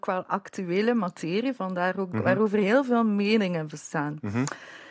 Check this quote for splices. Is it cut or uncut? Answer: cut